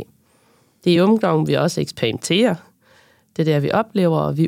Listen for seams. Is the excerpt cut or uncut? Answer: uncut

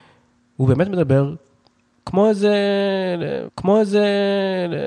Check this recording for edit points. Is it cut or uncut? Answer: cut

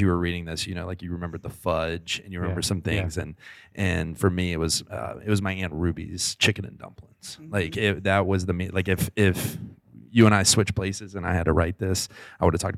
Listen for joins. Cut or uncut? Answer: uncut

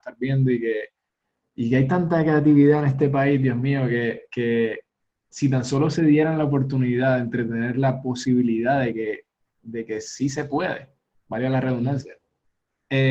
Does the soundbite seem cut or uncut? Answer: uncut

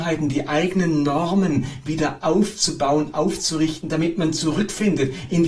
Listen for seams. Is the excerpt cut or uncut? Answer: uncut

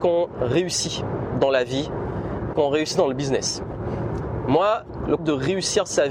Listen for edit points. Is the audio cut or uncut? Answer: cut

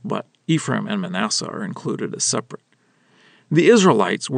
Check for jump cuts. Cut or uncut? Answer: uncut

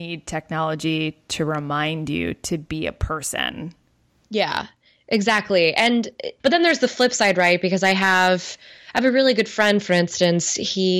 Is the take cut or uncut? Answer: uncut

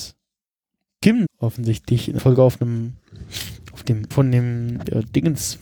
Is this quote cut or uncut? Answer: cut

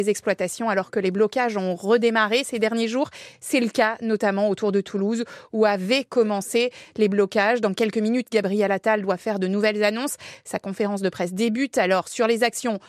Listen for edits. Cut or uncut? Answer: uncut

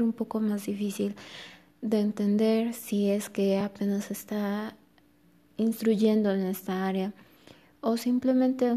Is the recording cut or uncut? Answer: uncut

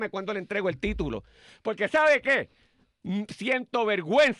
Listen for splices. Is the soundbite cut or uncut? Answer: uncut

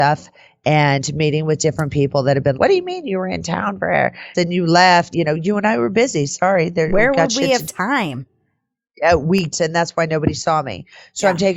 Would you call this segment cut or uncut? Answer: cut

